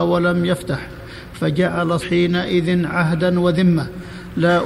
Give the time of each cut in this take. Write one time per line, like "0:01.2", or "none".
0:02.0

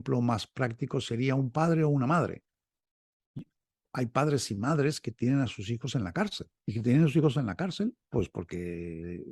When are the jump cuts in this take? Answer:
0:06.6

